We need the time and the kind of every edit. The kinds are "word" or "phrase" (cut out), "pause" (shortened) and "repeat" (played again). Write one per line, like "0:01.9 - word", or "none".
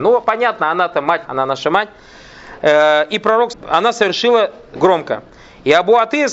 0:01.3 - word
0:03.5 - word
0:04.8 - word